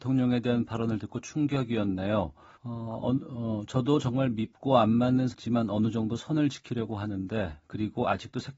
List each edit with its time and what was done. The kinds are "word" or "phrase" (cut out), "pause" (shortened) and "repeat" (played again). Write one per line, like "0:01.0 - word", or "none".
0:02.5 - pause
0:05.3 - word